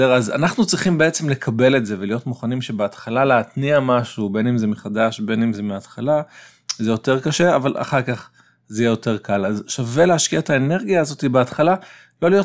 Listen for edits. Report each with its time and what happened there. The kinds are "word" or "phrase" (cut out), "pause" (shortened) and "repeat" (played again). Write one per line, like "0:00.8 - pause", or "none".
none